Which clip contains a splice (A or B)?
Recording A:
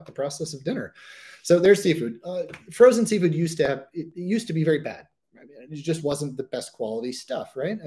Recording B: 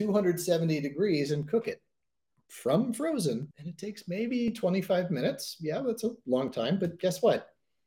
B